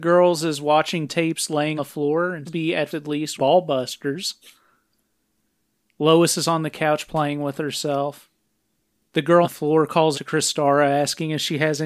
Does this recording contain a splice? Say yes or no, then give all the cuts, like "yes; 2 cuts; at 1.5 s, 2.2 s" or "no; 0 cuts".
yes; 7 cuts; at 1.1 s, 1.8 s, 2.5 s, 2.9 s, 3.4 s, 9.4 s, 10.1 s